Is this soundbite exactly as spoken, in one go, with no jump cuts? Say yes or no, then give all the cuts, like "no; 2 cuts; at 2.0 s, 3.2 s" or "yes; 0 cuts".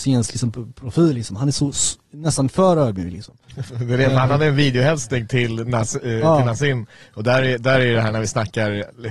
yes; 0 cuts